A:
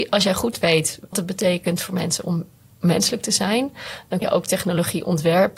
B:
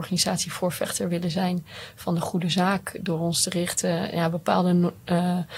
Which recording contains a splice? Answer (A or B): A